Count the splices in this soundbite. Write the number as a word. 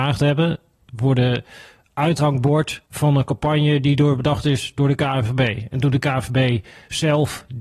one